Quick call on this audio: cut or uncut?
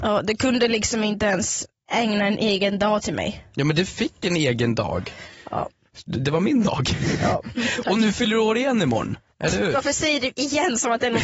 cut